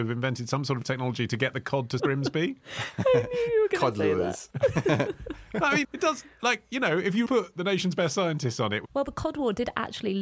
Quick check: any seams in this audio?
yes; 4 cuts; at 2.0 s, 4.5 s, 5.8 s, 7.3 s

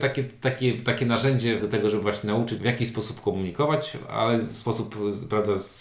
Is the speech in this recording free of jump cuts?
no; 2 cuts; at 1.6 s, 2.6 s

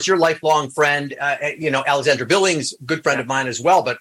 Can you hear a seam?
no; 0 cuts

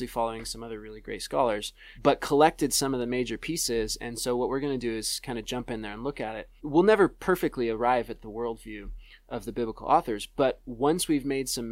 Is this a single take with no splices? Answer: yes; 0 cuts

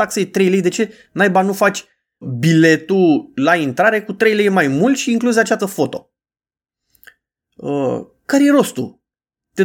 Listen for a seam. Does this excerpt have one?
yes; 2 cuts; at 2.2 s, 5.6 s

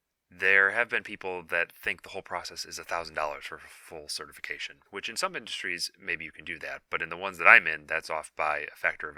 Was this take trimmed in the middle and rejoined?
yes; 1 cut; at 4.9 s

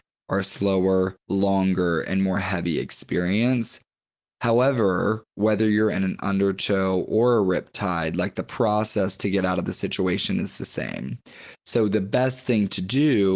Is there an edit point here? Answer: yes; 1 cut; at 1.2 s

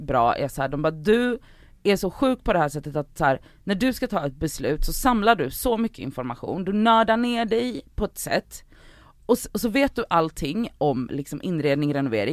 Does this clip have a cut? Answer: no; 0 cuts

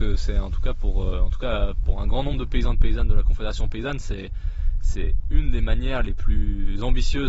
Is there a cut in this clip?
no; 0 cuts

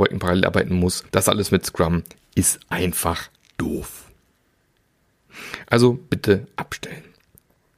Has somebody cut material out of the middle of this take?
yes; 3 cuts; at 1.1 s, 2.1 s, 3.4 s

